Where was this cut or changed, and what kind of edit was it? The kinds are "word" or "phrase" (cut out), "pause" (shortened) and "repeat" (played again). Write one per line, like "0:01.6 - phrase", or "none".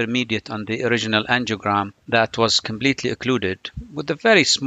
0:02.0 - pause